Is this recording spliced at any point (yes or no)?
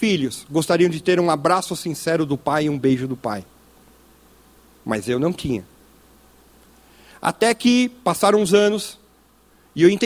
no